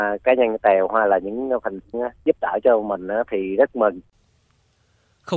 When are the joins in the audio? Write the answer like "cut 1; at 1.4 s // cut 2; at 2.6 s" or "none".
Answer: cut 1; at 1.9 s